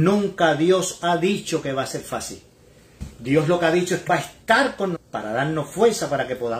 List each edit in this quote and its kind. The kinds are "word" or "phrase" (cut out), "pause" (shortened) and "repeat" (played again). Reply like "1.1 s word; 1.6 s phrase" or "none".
4.1 s word; 4.9 s word